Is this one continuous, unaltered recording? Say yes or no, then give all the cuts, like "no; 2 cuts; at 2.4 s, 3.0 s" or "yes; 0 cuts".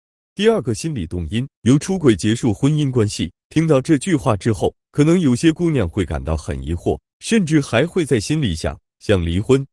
no; 2 cuts; at 1.5 s, 3.4 s